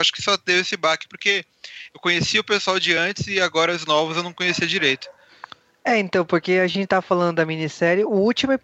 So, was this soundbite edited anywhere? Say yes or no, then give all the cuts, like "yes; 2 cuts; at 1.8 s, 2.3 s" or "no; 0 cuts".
no; 0 cuts